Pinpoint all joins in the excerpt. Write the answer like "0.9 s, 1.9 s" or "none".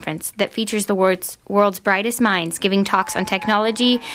none